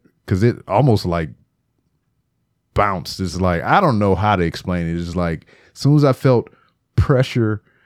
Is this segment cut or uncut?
uncut